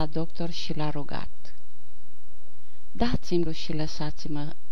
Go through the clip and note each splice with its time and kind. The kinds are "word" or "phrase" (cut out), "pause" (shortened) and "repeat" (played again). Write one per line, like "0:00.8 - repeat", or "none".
0:03.5 - word